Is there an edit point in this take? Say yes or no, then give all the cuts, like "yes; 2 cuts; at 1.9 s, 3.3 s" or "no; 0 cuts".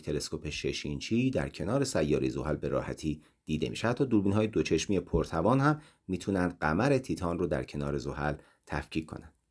no; 0 cuts